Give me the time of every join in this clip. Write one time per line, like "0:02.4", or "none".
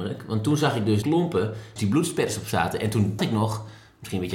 0:01.0
0:01.8
0:03.2